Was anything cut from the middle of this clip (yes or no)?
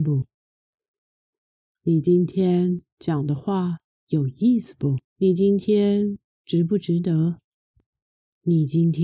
yes